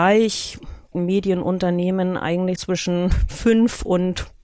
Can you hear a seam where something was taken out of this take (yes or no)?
yes